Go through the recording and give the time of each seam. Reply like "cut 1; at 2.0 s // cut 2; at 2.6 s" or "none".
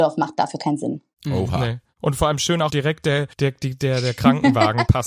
cut 1; at 2.7 s // cut 2; at 3.3 s